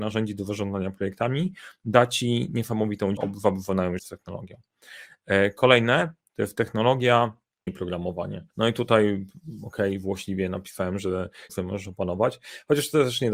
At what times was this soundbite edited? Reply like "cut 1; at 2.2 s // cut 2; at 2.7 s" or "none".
cut 1; at 3.2 s // cut 2; at 4.0 s // cut 3; at 7.7 s // cut 4; at 8.5 s // cut 5; at 11.5 s